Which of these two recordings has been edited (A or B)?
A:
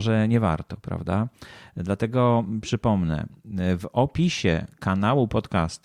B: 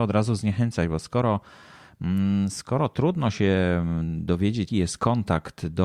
B